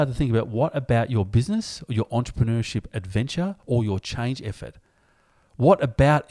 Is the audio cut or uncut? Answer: uncut